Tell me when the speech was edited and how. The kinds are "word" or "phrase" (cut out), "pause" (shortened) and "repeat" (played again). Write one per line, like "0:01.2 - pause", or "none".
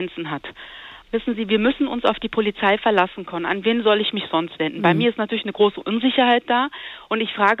none

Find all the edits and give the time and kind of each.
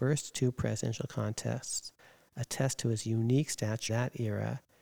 0:03.9 - word

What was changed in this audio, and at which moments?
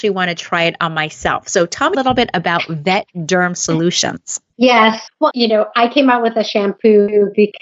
0:01.9 - word
0:04.5 - pause
0:05.3 - word

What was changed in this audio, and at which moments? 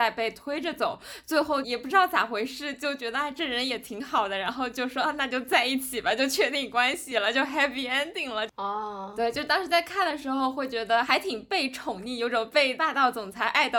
none

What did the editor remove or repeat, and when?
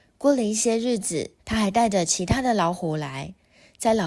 0:01.4 - pause

